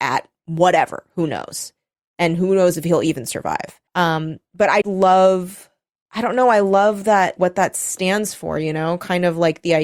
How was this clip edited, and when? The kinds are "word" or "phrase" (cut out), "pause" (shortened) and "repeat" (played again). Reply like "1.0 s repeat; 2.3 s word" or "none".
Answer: 3.9 s pause; 4.8 s word; 7.4 s word